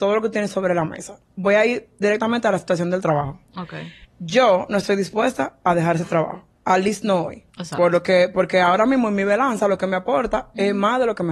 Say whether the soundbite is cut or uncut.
cut